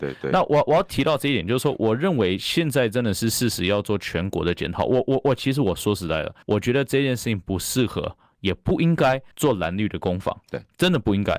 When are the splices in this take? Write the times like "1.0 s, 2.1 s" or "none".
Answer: 6.4 s, 9.3 s